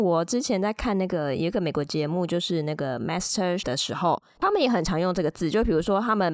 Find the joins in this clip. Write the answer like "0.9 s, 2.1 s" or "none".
3.6 s